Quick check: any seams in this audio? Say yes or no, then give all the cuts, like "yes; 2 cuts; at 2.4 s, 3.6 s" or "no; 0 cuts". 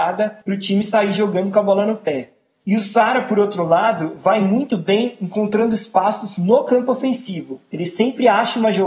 no; 0 cuts